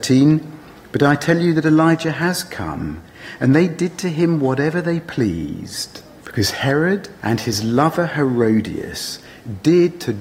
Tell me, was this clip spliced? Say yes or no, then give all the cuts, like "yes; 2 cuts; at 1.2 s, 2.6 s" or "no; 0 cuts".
yes; 2 cuts; at 6.2 s, 7.2 s